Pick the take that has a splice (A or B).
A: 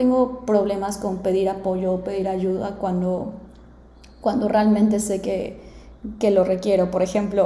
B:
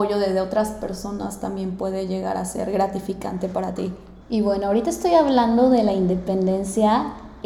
B